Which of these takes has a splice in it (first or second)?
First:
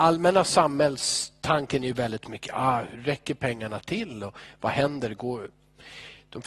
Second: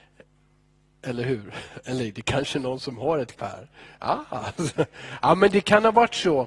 second